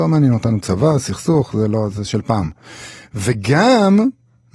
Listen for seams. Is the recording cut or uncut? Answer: uncut